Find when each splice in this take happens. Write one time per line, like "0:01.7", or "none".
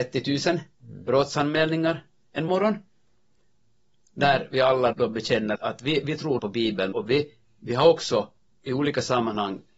0:02.5
0:04.9
0:05.6
0:06.4
0:06.9
0:08.5